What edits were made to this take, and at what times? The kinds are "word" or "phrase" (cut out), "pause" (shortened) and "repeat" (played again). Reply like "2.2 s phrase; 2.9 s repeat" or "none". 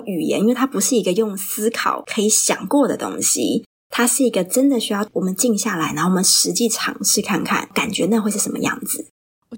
none